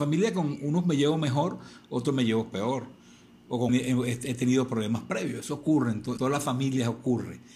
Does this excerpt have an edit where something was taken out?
yes; 2 cuts; at 3.7 s, 6.2 s

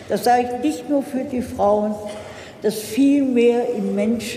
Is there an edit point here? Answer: no; 0 cuts

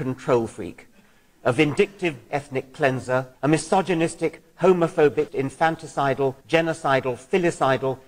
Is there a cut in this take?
yes; 4 cuts; at 2.3 s, 3.3 s, 5.3 s, 6.4 s

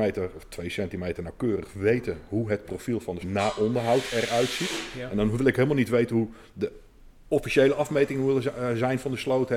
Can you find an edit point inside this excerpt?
yes; 1 cut; at 3.2 s

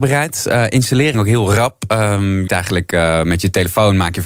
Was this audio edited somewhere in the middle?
yes; 2 cuts; at 1.1 s, 2.5 s

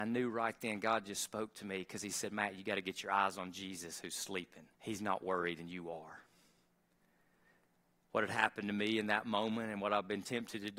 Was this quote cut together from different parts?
yes; 1 cut; at 4.7 s

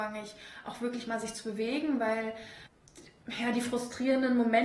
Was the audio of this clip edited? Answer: no; 0 cuts

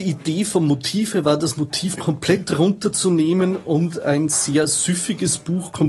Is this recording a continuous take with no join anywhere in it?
yes; 0 cuts

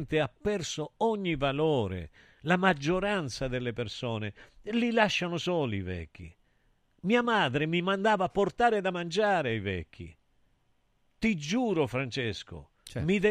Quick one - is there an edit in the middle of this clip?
no; 0 cuts

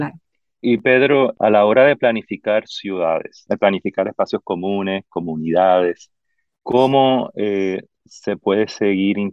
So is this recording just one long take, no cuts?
yes; 0 cuts

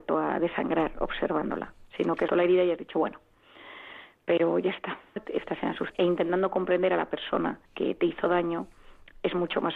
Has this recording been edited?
yes; 5 cuts; at 1.9 s, 2.3 s, 5.2 s, 5.9 s, 7.6 s

